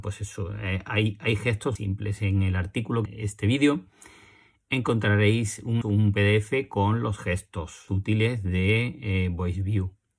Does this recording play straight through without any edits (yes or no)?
no